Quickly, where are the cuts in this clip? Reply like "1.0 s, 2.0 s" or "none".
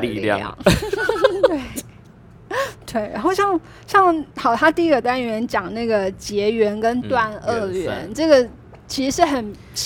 4.3 s